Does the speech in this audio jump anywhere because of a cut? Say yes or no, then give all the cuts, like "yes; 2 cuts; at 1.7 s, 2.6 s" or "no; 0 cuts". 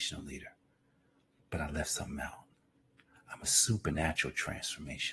no; 0 cuts